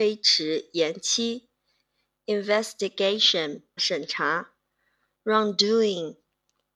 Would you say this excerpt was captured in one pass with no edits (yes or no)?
no